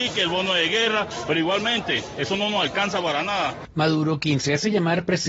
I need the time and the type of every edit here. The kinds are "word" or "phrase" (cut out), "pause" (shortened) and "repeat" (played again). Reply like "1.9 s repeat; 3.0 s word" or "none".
none